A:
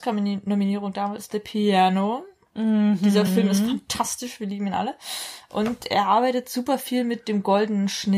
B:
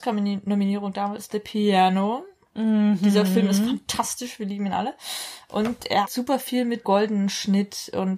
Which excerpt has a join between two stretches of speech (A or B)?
B